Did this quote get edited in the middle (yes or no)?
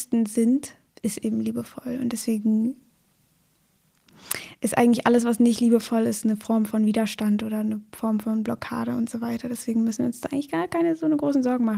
no